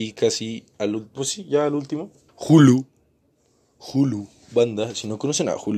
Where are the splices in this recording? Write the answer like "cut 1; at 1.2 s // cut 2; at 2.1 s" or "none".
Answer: cut 1; at 2.3 s